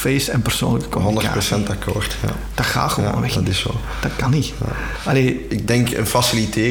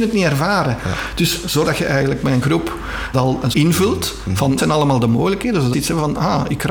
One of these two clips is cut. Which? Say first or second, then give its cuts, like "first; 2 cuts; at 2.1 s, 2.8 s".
second; 6 cuts; at 1.6 s, 2.4 s, 3.1 s, 3.5 s, 4.6 s, 5.7 s